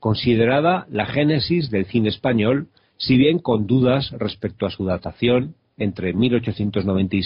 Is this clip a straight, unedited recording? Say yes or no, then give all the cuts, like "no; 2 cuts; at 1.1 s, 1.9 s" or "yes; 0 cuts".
yes; 0 cuts